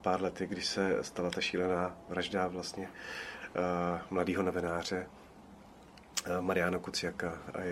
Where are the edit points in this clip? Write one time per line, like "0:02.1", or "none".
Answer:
none